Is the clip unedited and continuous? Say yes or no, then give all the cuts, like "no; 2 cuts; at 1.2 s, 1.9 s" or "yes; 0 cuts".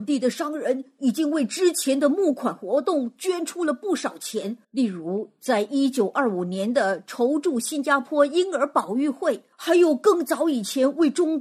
no; 2 cuts; at 4.6 s, 9.5 s